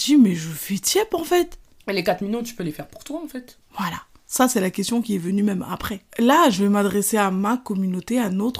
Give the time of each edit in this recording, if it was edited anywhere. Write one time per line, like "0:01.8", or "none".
0:01.8
0:03.7
0:06.1

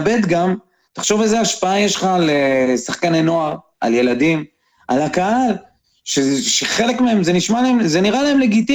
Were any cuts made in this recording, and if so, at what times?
none

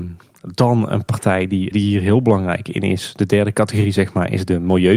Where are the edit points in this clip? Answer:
0:01.7

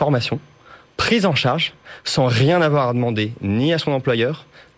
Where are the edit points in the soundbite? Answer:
none

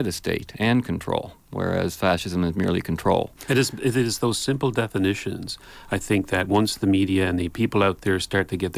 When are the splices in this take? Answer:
0:03.4

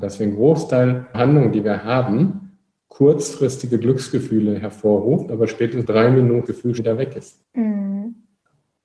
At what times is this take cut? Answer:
0:01.1
0:05.8
0:06.5
0:06.8

